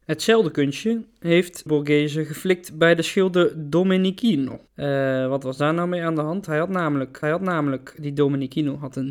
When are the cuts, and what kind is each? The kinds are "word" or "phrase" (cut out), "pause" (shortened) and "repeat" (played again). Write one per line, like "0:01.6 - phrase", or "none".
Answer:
0:01.7 - word
0:04.7 - pause
0:07.2 - repeat